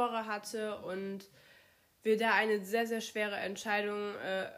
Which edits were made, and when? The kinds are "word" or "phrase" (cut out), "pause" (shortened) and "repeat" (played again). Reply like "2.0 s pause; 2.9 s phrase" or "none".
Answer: none

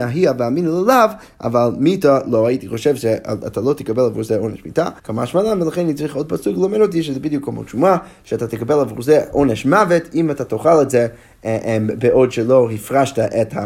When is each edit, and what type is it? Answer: 5.0 s pause

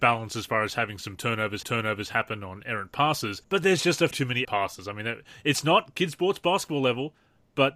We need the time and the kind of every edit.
1.6 s repeat; 3.4 s pause; 4.1 s word; 4.4 s word

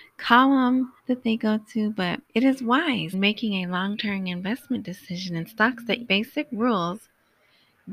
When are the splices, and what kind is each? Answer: 1.0 s pause; 2.3 s pause; 3.1 s word; 6.0 s phrase

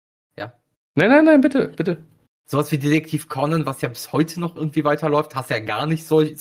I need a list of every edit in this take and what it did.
none

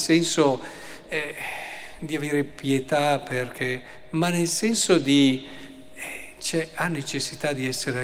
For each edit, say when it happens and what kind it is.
none

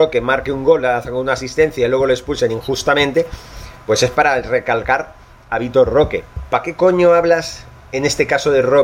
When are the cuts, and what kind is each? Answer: none

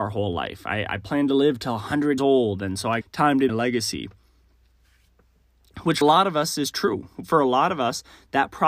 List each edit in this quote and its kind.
2.2 s word; 3.0 s word; 3.5 s phrase; 6.0 s phrase

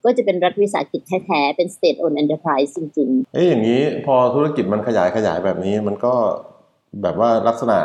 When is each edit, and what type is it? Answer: none

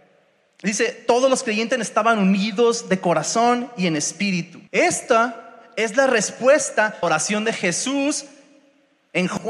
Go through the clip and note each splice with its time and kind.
4.7 s pause; 7.0 s phrase

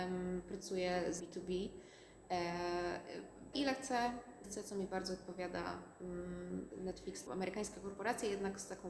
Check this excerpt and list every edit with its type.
1.2 s phrase; 3.5 s word; 4.4 s word; 6.7 s word; 7.3 s phrase

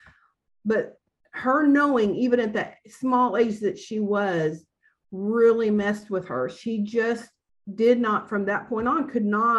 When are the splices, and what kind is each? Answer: none

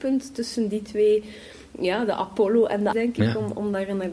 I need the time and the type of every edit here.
2.9 s word

